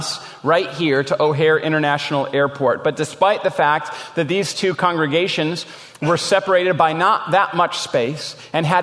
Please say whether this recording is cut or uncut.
uncut